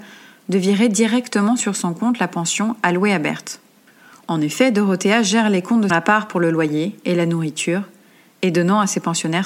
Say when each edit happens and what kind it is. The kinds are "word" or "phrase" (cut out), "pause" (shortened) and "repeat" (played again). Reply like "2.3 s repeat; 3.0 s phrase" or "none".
5.9 s phrase